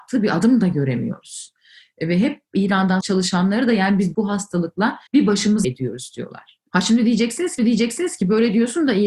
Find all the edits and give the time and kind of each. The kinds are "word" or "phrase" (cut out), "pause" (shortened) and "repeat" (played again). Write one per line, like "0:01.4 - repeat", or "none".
0:03.0 - word
0:05.1 - pause
0:05.6 - word
0:07.6 - repeat